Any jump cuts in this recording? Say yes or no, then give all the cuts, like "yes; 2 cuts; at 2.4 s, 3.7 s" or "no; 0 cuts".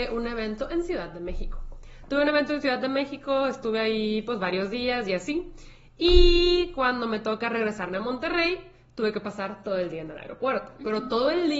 no; 0 cuts